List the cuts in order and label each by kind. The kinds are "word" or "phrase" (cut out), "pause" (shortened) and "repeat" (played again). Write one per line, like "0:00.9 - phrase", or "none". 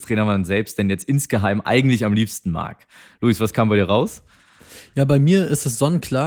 none